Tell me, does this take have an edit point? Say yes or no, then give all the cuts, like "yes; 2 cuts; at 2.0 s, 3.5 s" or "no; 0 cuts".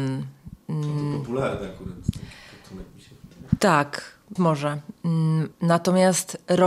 yes; 2 cuts; at 4.4 s, 5.5 s